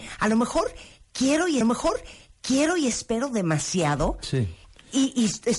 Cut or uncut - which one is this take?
cut